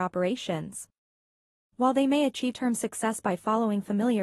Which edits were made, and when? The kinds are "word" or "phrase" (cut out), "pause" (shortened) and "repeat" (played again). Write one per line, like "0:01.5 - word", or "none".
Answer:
0:02.5 - word